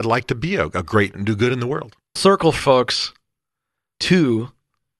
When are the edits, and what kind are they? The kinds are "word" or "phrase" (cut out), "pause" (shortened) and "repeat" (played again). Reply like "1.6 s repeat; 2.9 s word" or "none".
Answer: 1.1 s word; 2.2 s word; 2.6 s word